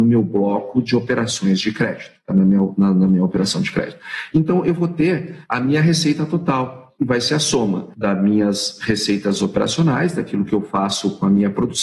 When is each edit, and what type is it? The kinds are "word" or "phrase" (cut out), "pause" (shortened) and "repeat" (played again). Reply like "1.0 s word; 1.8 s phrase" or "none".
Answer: none